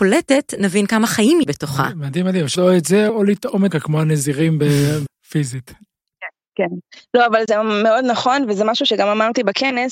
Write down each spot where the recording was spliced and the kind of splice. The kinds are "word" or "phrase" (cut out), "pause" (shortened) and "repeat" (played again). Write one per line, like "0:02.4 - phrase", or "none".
0:01.4 - word
0:02.6 - word
0:03.1 - word
0:03.7 - word
0:05.1 - word
0:07.5 - word